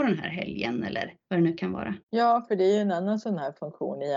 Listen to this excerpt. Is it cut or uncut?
cut